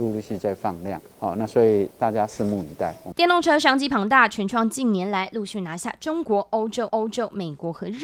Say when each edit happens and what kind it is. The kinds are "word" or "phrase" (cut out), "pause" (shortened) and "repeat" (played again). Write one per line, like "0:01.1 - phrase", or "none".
0:01.1 - pause
0:06.9 - repeat